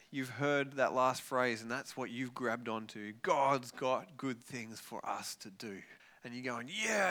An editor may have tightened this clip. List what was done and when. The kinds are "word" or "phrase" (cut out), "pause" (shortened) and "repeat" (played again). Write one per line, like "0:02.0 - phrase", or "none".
0:06.0 - pause